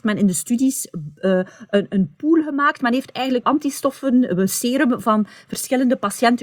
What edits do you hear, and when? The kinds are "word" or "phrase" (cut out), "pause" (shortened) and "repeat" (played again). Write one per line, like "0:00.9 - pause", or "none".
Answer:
0:03.4 - word